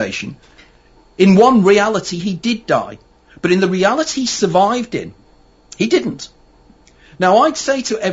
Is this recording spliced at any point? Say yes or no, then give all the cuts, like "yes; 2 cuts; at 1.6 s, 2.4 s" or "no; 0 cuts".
no; 0 cuts